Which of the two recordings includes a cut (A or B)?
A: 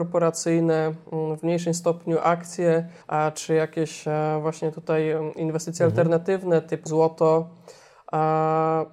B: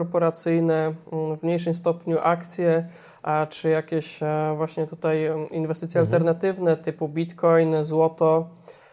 A